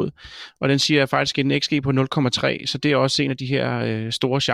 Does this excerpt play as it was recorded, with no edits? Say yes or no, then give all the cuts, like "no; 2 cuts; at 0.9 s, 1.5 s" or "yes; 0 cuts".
yes; 0 cuts